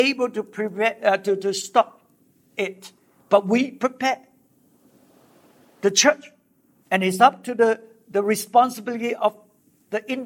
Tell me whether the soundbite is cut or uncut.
uncut